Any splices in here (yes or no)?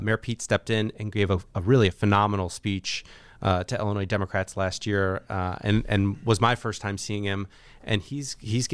no